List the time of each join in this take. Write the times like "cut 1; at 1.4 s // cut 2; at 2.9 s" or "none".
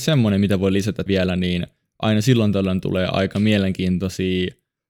cut 1; at 1.1 s